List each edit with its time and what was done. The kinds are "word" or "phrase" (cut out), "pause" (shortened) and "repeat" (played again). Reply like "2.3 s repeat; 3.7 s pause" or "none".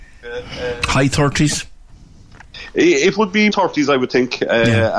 3.5 s word